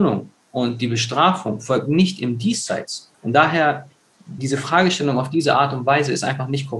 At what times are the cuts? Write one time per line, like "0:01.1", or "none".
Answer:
0:03.1
0:04.4